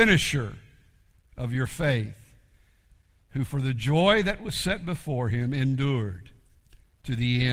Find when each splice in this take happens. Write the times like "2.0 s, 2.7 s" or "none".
none